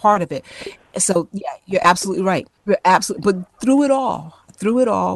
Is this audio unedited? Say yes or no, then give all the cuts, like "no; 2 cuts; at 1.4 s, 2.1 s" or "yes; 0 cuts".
no; 1 cut; at 2.6 s